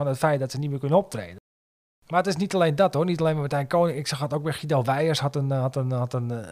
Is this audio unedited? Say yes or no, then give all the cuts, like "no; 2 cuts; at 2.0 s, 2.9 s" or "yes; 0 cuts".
yes; 0 cuts